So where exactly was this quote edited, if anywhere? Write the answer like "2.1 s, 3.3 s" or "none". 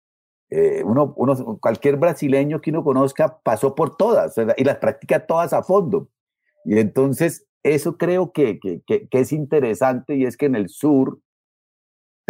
none